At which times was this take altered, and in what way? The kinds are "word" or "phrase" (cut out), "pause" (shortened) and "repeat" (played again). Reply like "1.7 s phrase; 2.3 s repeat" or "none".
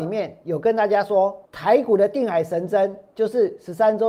1.4 s pause